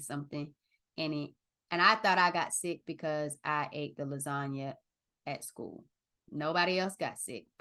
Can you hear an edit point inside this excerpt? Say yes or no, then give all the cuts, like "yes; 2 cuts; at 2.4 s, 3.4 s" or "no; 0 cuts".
no; 0 cuts